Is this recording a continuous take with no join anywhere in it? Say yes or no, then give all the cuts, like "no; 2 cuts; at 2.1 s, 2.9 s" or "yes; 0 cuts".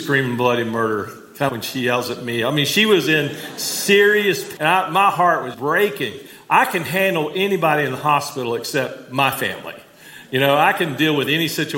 no; 3 cuts; at 1.5 s, 4.6 s, 5.5 s